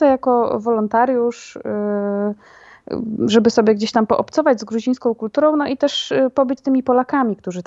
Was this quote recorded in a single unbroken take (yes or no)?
no